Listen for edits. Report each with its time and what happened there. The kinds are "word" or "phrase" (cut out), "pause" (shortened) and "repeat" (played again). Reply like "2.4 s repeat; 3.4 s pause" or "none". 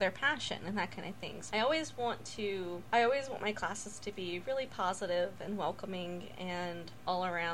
1.5 s phrase